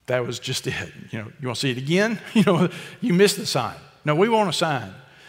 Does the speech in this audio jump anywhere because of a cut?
no; 0 cuts

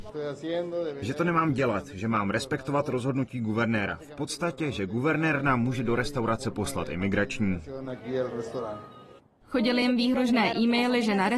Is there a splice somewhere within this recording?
no; 0 cuts

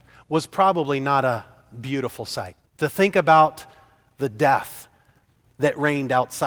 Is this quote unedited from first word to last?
no; 1 cut; at 2.7 s

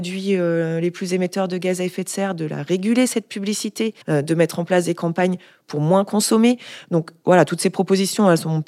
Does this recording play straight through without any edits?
no; 1 cut; at 4.0 s

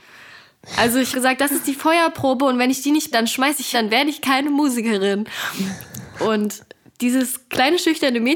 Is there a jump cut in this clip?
yes; 3 cuts; at 1.1 s, 3.1 s, 3.7 s

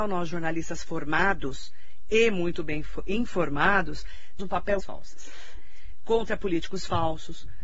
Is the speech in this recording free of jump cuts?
no; 2 cuts; at 4.4 s, 4.8 s

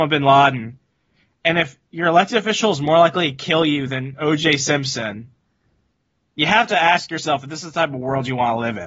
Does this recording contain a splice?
no; 0 cuts

